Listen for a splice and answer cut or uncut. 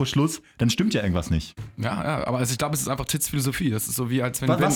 uncut